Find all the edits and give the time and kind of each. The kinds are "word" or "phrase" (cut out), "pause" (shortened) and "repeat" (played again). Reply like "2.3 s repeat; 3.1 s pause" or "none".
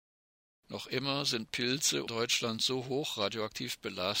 2.1 s phrase

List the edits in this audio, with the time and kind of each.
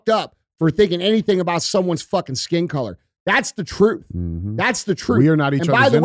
none

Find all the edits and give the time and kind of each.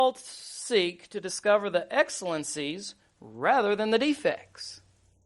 none

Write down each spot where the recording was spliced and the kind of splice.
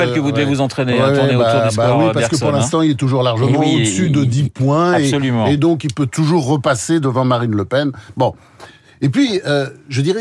none

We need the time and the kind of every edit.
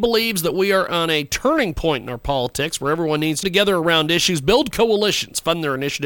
3.4 s phrase

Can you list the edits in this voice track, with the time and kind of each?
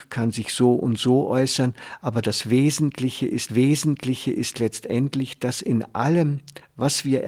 3.5 s repeat

